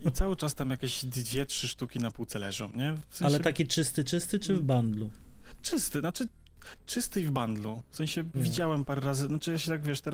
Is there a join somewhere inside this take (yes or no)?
no